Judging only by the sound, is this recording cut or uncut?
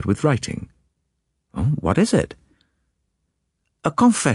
uncut